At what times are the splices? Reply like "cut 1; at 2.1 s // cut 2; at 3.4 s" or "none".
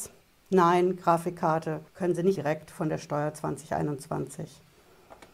cut 1; at 1.9 s // cut 2; at 2.4 s